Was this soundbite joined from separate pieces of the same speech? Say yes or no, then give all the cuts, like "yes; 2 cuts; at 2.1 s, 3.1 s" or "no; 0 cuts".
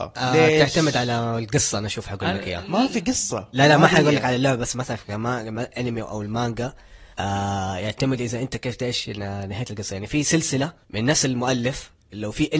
yes; 2 cuts; at 7.1 s, 10.8 s